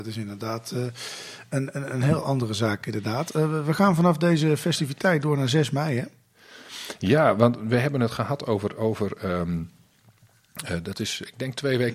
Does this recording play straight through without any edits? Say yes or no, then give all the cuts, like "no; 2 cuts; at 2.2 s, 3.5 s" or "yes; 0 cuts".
yes; 0 cuts